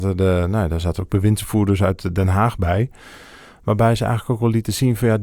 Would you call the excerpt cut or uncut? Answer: uncut